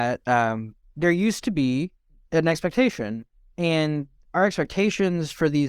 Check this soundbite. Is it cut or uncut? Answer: uncut